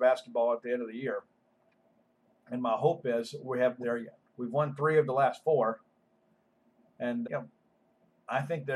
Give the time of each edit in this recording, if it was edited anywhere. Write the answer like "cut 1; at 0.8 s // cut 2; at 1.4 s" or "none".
cut 1; at 3.8 s // cut 2; at 7.2 s